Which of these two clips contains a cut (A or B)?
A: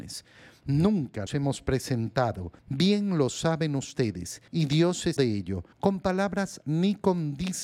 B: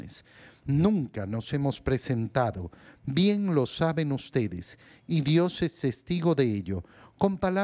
A